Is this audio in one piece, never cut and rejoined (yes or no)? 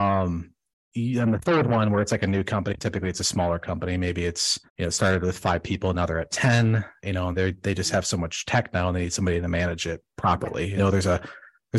no